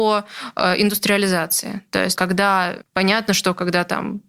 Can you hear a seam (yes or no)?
yes